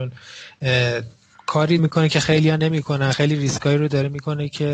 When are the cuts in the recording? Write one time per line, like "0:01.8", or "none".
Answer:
0:01.8